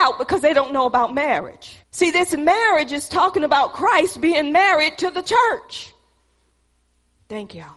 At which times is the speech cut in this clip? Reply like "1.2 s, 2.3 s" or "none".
1.8 s